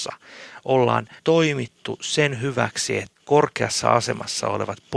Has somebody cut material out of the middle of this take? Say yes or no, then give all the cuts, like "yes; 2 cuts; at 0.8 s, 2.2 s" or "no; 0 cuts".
yes; 2 cuts; at 1.2 s, 3.2 s